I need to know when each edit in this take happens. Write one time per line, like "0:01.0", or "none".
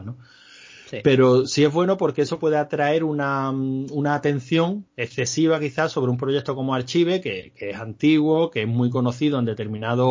0:04.9